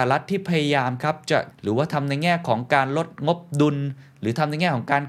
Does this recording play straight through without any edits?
no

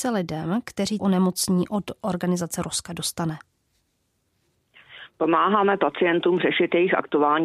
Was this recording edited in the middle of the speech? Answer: yes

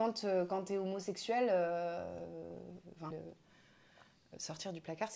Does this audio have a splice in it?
yes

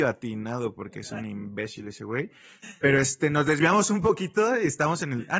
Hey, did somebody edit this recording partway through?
no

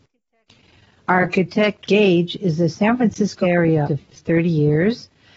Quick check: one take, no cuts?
no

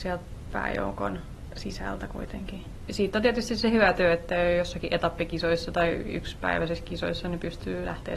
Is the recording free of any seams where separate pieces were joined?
yes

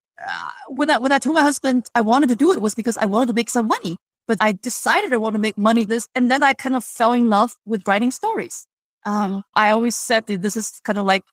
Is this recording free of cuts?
no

